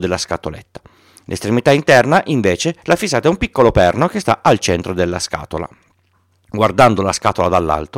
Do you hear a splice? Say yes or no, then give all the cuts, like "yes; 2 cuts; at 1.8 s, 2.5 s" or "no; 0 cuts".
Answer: no; 0 cuts